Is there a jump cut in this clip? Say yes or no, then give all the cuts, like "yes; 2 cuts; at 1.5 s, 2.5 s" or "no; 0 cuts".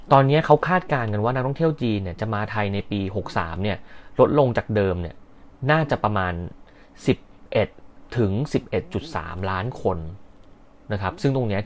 no; 0 cuts